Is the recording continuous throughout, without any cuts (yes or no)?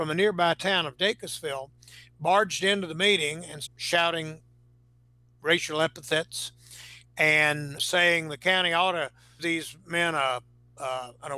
no